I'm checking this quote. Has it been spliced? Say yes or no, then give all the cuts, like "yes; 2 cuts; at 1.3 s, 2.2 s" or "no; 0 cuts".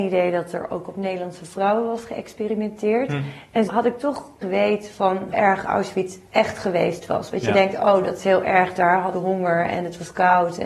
yes; 4 cuts; at 3.7 s, 4.4 s, 5.3 s, 9.1 s